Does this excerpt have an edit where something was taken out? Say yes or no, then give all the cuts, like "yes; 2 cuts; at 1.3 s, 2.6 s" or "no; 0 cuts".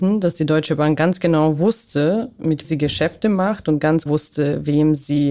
yes; 2 cuts; at 2.6 s, 4.1 s